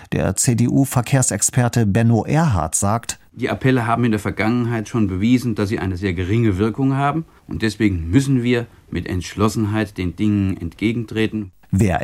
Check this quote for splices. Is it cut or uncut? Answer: uncut